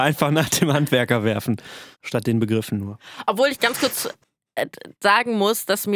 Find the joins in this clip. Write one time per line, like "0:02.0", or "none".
0:01.9
0:04.9

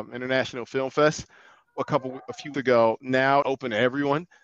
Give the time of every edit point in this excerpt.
0:01.7
0:02.5
0:03.4

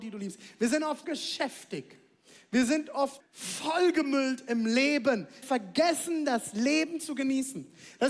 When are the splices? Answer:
0:01.0
0:03.2
0:05.4

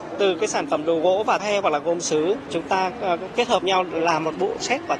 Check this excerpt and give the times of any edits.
0:01.4
0:03.6

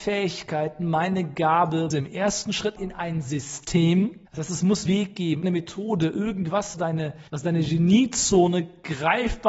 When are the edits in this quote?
0:01.9
0:02.8
0:04.3
0:04.9
0:05.4
0:06.7
0:07.3

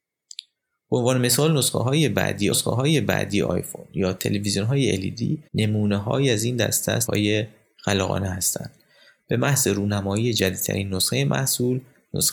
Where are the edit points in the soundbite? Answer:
0:02.5
0:05.5
0:07.1

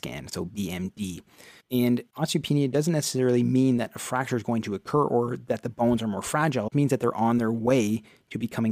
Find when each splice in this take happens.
0:06.7

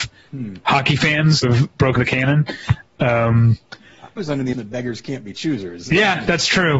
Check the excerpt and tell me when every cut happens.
0:01.4
0:02.0
0:04.2
0:04.5

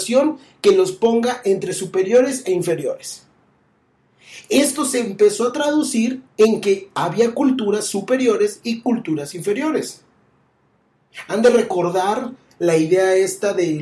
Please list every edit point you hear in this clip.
0:06.3

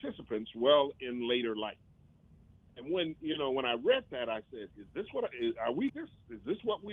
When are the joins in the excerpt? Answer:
0:05.9

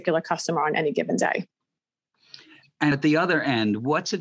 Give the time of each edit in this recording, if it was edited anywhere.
0:02.9

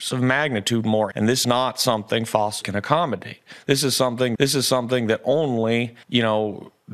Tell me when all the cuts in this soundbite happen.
0:01.1
0:01.4
0:02.6
0:04.3
0:06.0

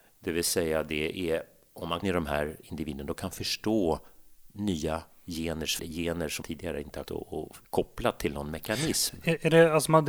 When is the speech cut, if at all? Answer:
0:02.0
0:04.5
0:05.8
0:06.4
0:07.1
0:07.6

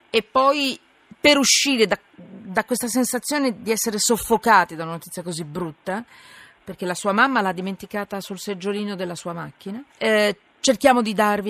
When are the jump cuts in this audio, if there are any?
0:02.1
0:09.9

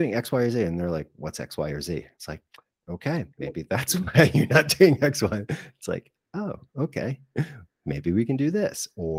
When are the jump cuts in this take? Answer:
none

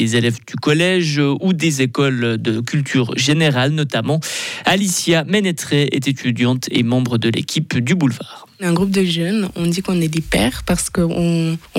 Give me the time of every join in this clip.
none

